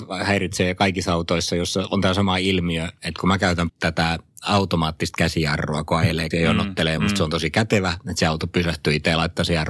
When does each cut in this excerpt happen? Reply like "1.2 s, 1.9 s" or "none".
3.7 s, 6.3 s, 7.0 s